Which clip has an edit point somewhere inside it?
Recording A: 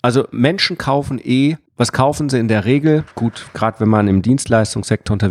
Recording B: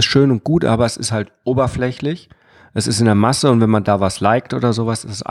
A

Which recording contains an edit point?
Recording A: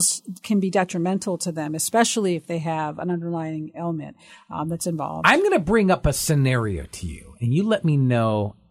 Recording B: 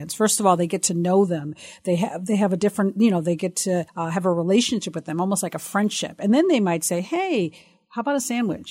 B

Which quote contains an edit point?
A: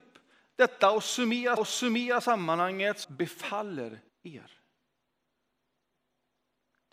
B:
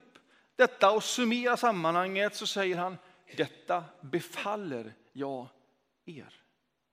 A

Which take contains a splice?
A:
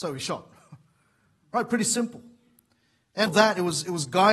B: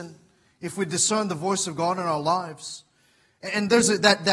A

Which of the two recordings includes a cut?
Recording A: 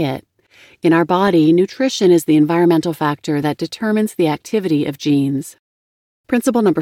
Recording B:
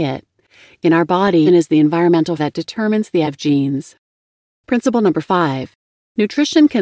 B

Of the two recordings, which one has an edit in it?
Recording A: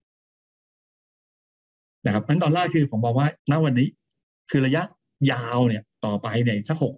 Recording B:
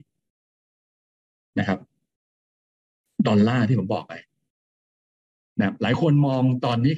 A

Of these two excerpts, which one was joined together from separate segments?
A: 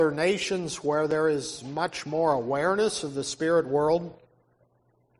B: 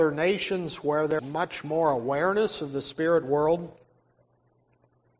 B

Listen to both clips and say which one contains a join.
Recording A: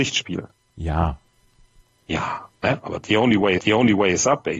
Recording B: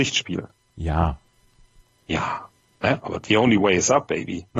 A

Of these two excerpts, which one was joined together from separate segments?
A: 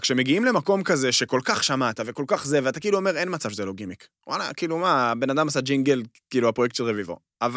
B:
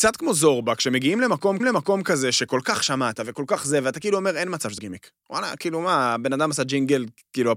B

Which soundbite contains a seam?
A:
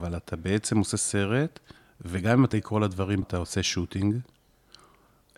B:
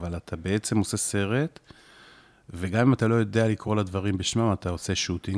A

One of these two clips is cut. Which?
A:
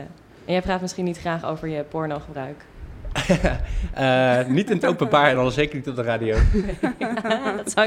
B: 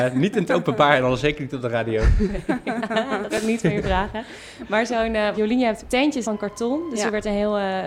B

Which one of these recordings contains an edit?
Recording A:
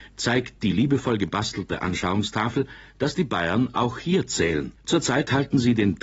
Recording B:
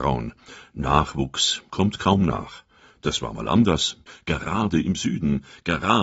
A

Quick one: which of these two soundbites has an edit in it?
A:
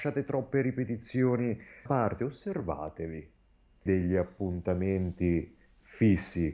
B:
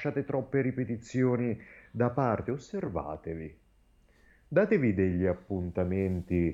A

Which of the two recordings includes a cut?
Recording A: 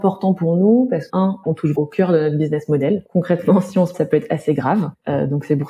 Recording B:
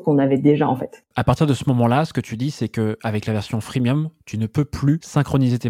A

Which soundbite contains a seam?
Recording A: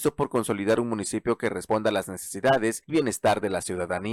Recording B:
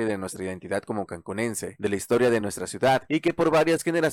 A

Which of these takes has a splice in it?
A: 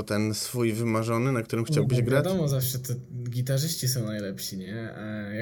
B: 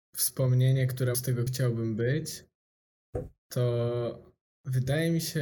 B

